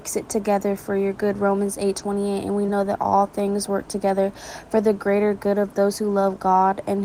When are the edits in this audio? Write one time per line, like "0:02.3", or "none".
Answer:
none